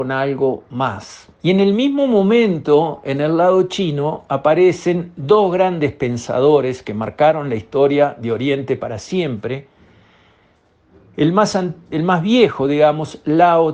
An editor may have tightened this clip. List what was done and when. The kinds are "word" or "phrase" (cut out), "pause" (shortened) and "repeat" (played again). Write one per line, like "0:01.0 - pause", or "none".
0:01.3 - pause

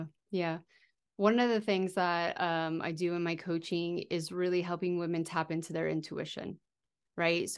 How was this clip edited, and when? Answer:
none

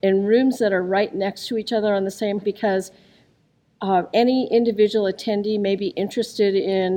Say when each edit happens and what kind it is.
0:02.4 - word

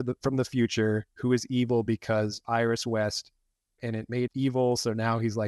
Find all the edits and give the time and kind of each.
0:01.1 - pause
0:03.8 - word
0:04.3 - word

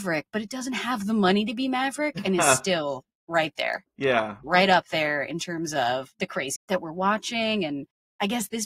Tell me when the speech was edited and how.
0:06.6 - phrase

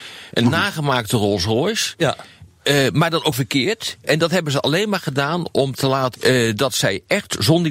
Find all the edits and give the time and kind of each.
0:03.3 - word
0:06.1 - word

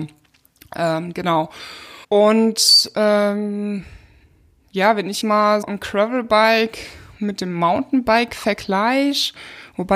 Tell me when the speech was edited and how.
0:02.0 - pause
0:05.2 - word
0:05.6 - word

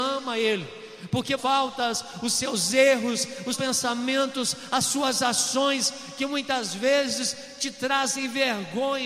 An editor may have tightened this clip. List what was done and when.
0:01.4 - phrase
0:03.5 - phrase

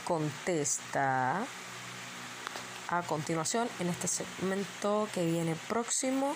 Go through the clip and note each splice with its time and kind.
none

